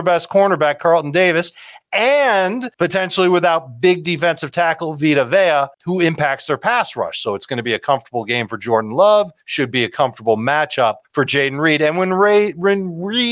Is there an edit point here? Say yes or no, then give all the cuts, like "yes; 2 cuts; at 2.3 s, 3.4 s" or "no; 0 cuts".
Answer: yes; 4 cuts; at 2.7 s, 5.7 s, 9.4 s, 11.0 s